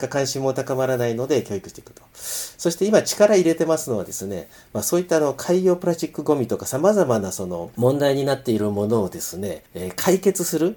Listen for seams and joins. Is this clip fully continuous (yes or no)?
no